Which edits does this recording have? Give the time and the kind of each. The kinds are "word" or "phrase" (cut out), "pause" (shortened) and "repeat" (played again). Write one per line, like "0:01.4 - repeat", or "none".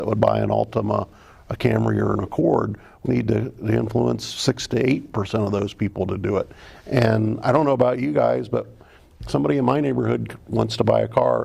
0:03.1 - word